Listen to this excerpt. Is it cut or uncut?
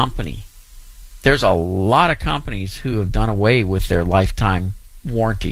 uncut